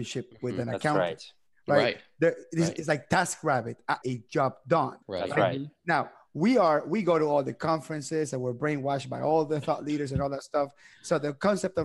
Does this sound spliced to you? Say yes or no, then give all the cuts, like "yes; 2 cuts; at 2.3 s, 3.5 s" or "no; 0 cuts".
yes; 2 cuts; at 4.0 s, 5.0 s